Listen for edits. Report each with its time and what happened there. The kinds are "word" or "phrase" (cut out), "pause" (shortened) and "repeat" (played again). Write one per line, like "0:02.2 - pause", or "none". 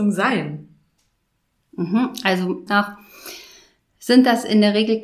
0:02.7 - phrase